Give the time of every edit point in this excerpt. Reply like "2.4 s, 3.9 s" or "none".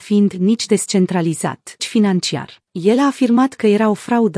1.8 s, 2.7 s